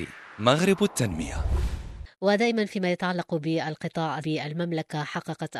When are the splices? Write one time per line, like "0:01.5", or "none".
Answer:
0:04.2